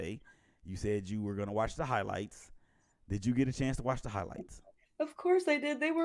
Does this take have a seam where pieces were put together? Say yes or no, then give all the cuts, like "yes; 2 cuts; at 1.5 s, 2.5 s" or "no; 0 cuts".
no; 0 cuts